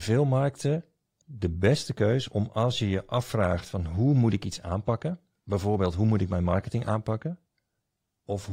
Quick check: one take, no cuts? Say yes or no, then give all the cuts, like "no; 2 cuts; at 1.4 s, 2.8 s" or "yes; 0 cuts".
yes; 0 cuts